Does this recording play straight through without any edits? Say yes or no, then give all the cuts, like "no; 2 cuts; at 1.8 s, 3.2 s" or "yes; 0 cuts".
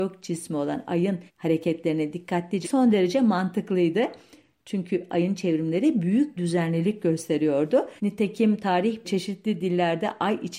no; 5 cuts; at 1.3 s, 2.6 s, 6.4 s, 8.0 s, 9.0 s